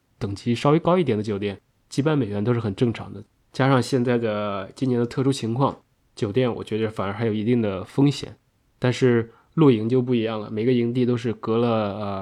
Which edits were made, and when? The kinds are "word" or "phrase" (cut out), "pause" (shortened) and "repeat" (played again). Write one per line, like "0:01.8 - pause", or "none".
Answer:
0:03.3 - pause